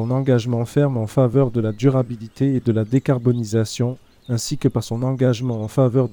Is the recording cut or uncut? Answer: uncut